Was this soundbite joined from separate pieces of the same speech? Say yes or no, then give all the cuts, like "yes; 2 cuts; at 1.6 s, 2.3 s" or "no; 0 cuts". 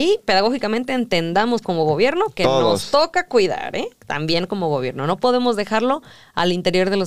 no; 0 cuts